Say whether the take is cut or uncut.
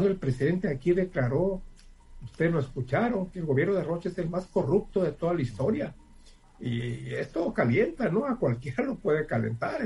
uncut